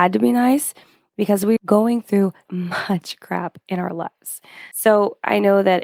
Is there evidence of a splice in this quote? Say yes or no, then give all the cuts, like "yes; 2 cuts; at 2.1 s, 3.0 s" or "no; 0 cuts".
yes; 3 cuts; at 1.6 s, 2.4 s, 4.7 s